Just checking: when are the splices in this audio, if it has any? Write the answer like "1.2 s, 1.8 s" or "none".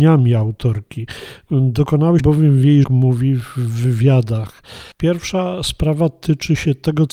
2.2 s, 2.8 s, 4.9 s